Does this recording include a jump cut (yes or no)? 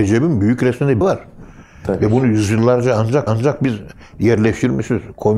yes